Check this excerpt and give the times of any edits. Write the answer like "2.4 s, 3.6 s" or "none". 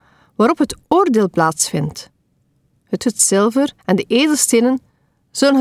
3.0 s, 3.8 s